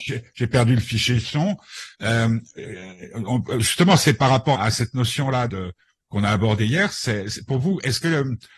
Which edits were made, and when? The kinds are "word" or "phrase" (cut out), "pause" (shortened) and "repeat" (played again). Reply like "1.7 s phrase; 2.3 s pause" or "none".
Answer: 1.9 s pause; 4.5 s word; 5.5 s word